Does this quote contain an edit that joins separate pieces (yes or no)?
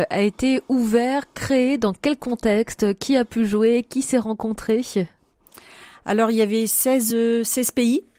no